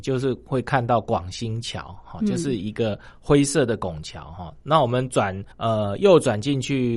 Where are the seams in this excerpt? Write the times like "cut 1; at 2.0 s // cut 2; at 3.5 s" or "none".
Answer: cut 1; at 5.5 s